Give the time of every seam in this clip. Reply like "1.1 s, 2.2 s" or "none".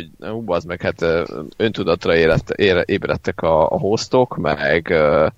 none